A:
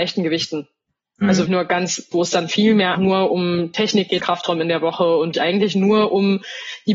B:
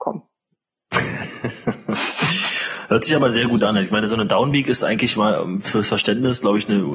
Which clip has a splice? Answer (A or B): A